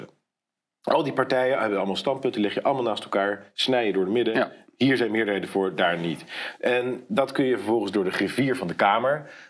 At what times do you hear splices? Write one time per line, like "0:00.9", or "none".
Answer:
none